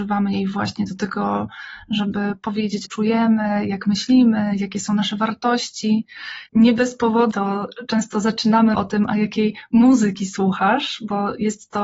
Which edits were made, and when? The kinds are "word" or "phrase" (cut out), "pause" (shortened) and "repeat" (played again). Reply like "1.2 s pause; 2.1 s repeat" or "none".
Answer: 2.8 s phrase; 6.5 s pause; 7.3 s phrase; 8.7 s word